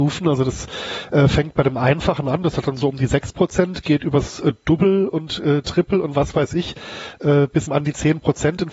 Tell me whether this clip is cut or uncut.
cut